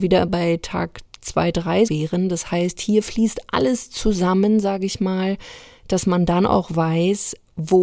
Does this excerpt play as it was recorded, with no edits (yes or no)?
no